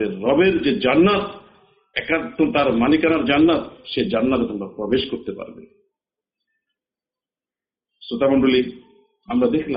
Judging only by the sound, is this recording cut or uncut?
uncut